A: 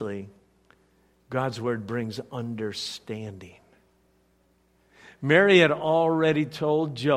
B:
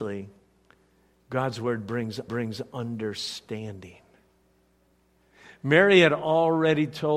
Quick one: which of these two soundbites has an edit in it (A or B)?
B